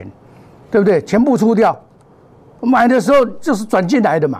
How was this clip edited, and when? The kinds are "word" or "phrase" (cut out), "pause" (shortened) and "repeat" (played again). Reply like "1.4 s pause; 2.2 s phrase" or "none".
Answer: none